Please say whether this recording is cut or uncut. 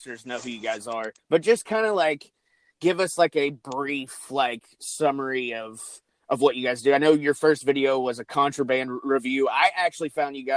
cut